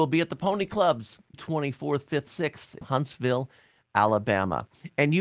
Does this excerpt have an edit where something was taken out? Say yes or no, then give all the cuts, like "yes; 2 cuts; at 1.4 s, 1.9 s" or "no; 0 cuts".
yes; 3 cuts; at 1.3 s, 2.3 s, 2.8 s